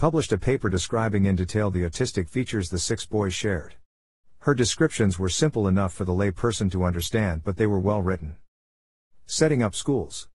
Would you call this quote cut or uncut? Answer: uncut